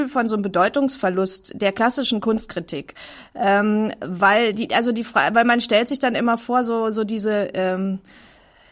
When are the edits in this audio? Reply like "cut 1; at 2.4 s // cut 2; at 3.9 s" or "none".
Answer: none